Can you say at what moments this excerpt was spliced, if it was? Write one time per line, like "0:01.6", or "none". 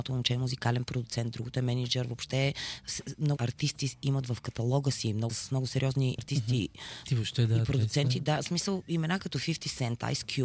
0:03.4
0:05.3
0:06.2
0:07.1